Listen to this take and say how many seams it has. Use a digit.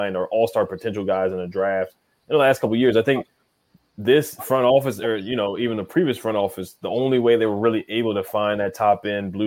0